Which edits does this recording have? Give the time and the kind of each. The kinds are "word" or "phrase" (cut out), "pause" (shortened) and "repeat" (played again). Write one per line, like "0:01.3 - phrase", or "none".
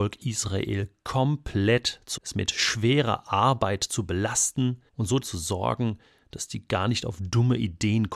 0:02.2 - word
0:04.9 - pause
0:05.2 - word